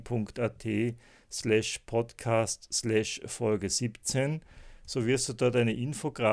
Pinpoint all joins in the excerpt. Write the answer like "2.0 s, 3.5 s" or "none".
none